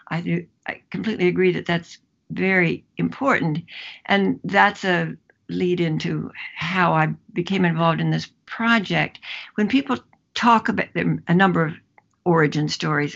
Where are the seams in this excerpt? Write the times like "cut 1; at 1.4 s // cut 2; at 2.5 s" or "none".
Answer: none